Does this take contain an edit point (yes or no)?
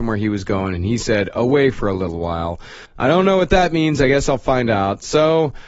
yes